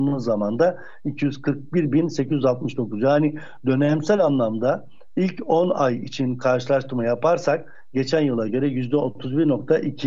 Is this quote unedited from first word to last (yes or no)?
yes